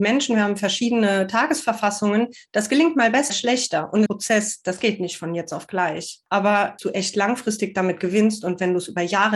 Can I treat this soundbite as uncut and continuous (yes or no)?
no